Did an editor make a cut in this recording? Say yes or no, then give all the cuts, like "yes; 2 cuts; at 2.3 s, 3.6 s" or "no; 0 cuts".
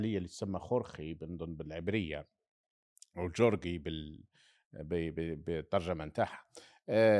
no; 0 cuts